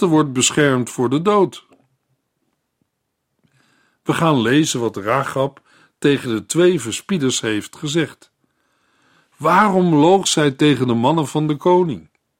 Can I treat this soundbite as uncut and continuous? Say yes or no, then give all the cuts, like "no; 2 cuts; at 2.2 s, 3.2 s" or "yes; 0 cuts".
yes; 0 cuts